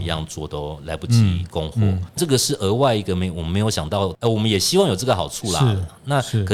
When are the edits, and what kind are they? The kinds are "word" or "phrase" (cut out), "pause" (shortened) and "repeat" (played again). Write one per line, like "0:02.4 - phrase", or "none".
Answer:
0:02.2 - phrase